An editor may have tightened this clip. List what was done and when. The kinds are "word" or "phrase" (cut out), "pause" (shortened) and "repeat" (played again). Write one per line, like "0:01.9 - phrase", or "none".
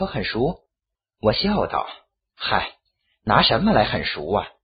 0:00.9 - pause